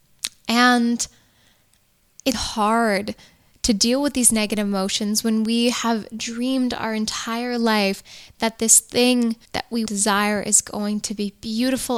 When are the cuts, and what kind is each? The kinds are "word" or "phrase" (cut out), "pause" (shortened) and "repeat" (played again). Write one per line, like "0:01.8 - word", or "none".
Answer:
0:02.3 - word
0:09.4 - pause
0:09.9 - phrase